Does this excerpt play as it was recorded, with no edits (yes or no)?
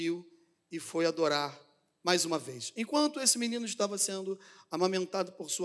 yes